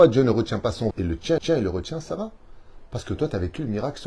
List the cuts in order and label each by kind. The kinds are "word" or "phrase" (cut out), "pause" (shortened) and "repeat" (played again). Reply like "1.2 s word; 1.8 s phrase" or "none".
0.9 s phrase; 1.4 s repeat